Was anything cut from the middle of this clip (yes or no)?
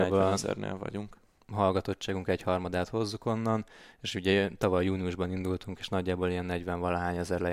no